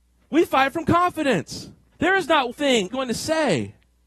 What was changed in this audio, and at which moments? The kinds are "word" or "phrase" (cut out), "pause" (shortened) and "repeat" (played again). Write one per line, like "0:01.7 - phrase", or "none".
0:01.9 - pause
0:02.5 - word
0:02.9 - word